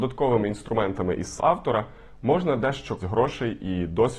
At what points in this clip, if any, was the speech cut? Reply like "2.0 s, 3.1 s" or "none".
1.4 s, 3.0 s